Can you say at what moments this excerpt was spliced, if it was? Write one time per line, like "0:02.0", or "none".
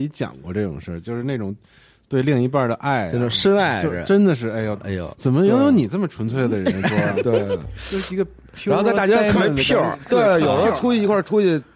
none